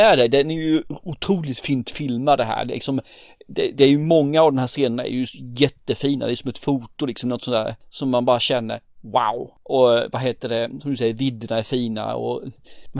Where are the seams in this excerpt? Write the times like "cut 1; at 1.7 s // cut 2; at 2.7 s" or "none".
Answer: none